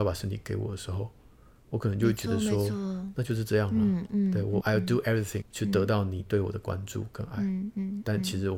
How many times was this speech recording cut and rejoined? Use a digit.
2